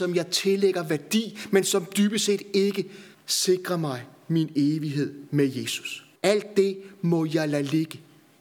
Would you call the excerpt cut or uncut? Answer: cut